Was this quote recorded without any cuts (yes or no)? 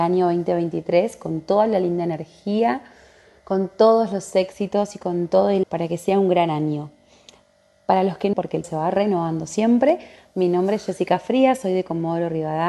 no